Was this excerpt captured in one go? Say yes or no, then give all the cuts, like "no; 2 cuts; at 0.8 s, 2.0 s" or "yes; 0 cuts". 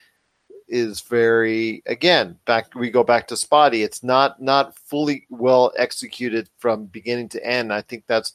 yes; 0 cuts